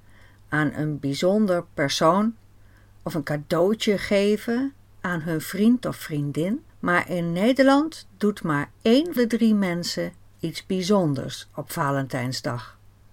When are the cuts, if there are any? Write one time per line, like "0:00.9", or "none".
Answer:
0:06.7
0:09.2